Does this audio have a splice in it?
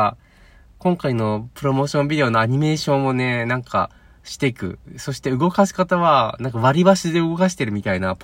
no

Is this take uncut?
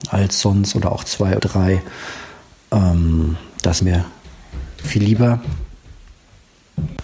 no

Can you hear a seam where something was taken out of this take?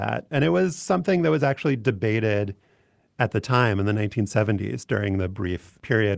no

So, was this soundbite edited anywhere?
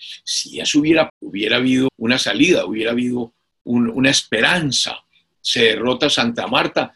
yes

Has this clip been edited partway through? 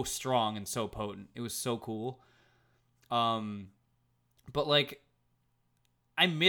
no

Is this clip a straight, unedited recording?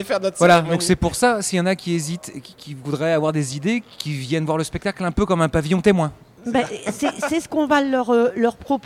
yes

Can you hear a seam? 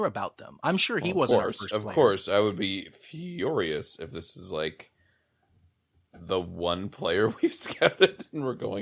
no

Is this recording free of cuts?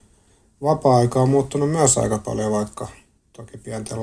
yes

